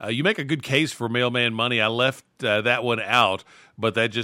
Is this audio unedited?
yes; 0 cuts

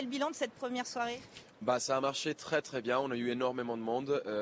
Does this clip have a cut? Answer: no; 0 cuts

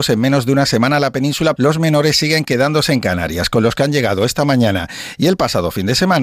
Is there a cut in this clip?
yes; 1 cut; at 1.6 s

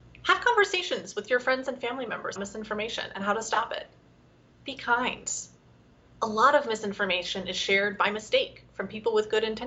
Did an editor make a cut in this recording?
yes; 1 cut; at 2.4 s

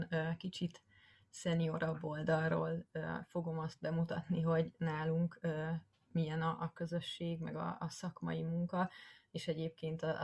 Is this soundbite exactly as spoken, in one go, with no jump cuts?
yes; 0 cuts

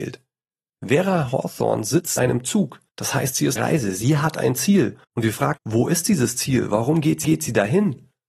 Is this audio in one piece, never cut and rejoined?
no; 6 cuts; at 2.2 s, 2.9 s, 3.6 s, 5.0 s, 5.6 s, 7.2 s

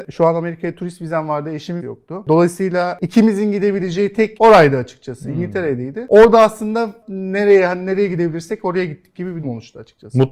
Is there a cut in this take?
yes; 4 cuts; at 1.8 s, 4.4 s, 7.0 s, 9.4 s

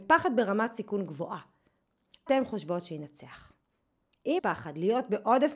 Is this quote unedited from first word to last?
no; 2 cuts; at 2.3 s, 4.4 s

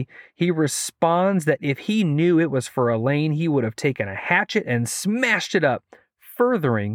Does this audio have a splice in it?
no; 0 cuts

